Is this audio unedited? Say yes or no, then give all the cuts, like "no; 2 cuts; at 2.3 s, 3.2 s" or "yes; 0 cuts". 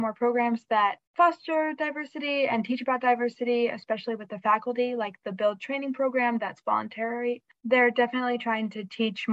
no; 1 cut; at 1.1 s